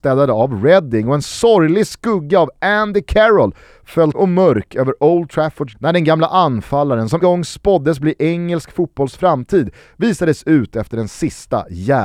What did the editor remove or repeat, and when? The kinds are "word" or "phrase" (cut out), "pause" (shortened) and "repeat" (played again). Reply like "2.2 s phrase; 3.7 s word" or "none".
4.1 s word; 5.7 s word; 7.2 s word